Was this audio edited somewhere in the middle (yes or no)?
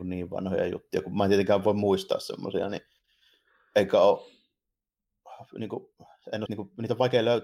yes